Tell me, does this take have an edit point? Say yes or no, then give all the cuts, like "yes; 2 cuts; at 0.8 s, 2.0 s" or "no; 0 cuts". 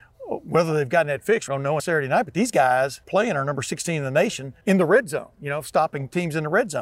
yes; 4 cuts; at 1.5 s, 1.8 s, 3.0 s, 4.6 s